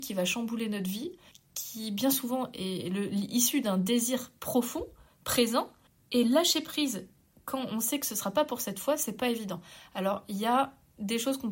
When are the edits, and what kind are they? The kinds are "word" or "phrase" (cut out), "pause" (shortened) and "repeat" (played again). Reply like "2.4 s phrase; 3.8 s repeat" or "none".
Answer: none